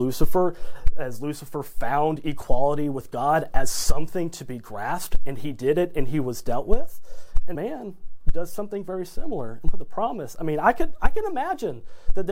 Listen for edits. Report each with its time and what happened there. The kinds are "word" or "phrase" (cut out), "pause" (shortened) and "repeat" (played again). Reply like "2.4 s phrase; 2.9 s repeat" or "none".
7.5 s word